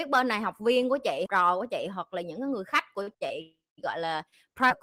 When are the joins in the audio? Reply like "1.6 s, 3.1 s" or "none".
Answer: 1.3 s, 3.1 s

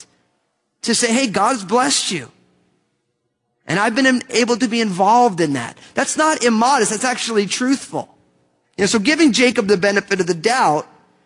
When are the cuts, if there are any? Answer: none

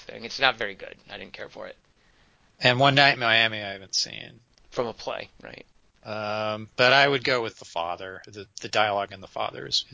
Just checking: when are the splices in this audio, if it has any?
none

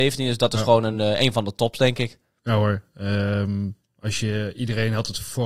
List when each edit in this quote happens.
none

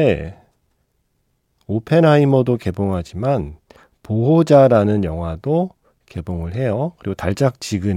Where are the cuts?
none

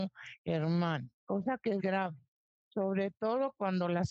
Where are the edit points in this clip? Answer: 1.2 s, 1.8 s

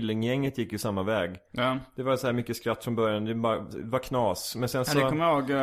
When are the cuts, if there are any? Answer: none

